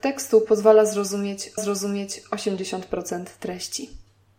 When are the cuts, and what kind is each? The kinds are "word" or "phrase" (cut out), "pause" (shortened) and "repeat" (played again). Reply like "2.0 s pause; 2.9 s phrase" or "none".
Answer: 1.6 s repeat